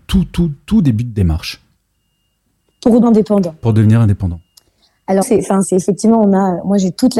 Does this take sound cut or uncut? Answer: cut